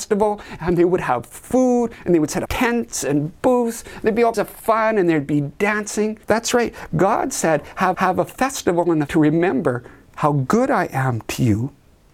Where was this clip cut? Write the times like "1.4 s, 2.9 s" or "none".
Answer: 2.5 s, 4.3 s, 6.2 s, 7.9 s, 9.1 s, 10.1 s